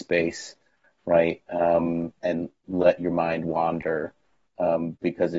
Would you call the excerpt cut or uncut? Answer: uncut